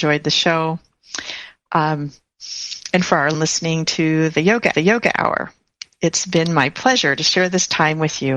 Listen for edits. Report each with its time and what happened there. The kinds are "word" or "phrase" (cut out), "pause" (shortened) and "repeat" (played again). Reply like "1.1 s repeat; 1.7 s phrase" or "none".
3.3 s phrase; 4.7 s repeat